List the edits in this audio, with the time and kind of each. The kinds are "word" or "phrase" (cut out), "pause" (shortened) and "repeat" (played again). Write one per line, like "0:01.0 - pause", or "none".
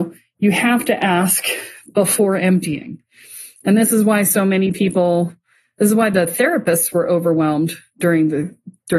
none